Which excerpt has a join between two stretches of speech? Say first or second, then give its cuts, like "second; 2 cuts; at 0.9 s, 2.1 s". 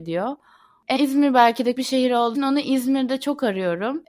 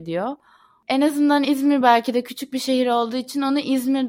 first; 3 cuts; at 1.0 s, 1.7 s, 2.3 s